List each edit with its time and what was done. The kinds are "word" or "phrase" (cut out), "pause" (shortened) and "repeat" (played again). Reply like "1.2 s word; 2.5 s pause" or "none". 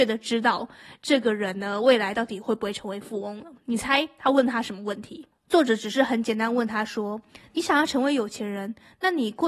5.3 s pause